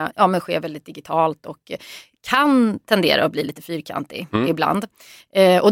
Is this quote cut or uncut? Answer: uncut